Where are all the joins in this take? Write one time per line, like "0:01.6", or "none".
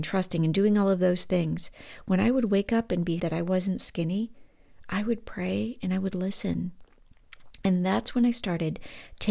0:03.2